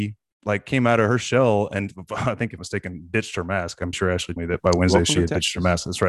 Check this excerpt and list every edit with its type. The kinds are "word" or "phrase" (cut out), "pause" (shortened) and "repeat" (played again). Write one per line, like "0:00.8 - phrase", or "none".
0:02.6 - phrase
0:03.9 - word
0:04.4 - word